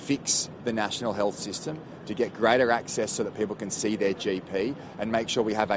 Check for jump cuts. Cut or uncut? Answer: uncut